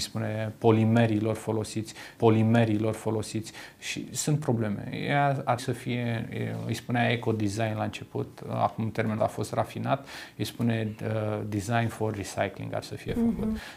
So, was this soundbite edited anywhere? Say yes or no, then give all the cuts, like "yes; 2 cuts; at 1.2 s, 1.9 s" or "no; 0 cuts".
yes; 4 cuts; at 2.2 s, 5.6 s, 9.2 s, 12.8 s